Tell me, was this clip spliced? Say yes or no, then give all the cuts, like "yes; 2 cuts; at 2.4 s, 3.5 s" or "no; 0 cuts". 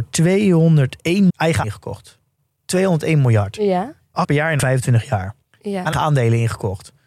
yes; 6 cuts; at 1.3 s, 1.6 s, 4.2 s, 4.6 s, 5.4 s, 5.9 s